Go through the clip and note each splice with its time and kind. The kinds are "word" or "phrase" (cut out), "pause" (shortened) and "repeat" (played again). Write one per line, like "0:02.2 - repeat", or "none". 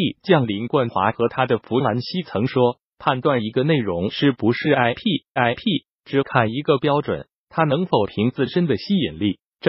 0:05.4 - repeat